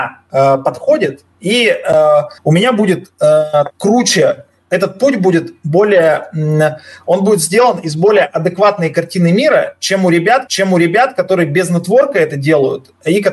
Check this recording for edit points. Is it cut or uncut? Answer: cut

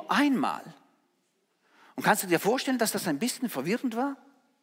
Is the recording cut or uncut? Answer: uncut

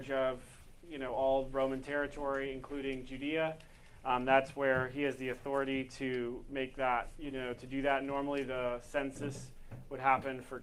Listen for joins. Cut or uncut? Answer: uncut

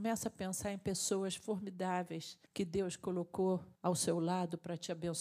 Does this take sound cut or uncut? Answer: cut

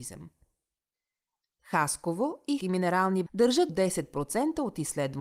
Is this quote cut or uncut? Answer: cut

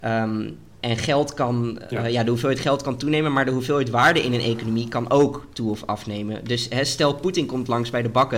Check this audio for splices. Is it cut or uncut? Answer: uncut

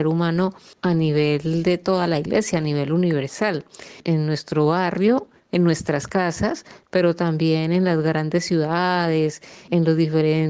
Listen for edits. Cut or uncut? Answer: uncut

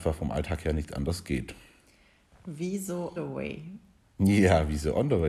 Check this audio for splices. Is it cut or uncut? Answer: cut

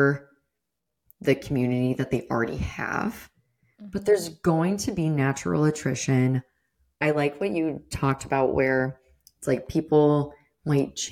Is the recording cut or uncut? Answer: uncut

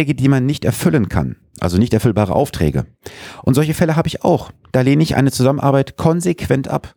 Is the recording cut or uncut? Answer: uncut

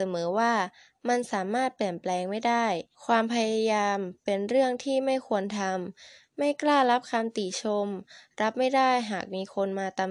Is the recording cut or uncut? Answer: cut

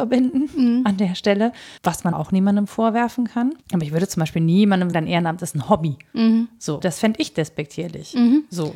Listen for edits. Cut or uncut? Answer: cut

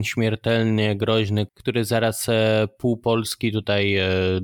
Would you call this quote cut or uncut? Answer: cut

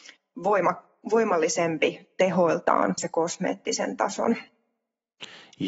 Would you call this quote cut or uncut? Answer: cut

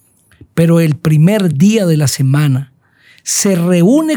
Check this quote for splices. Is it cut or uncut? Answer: uncut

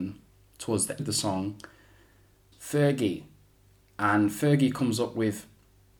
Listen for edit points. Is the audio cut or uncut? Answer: cut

